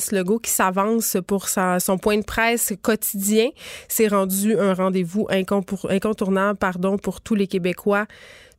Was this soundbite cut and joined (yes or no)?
no